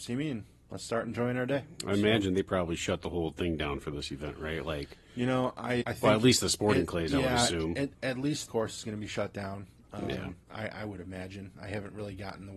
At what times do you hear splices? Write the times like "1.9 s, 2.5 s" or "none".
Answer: 5.8 s, 8.5 s